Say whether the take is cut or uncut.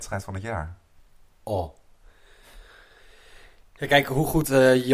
cut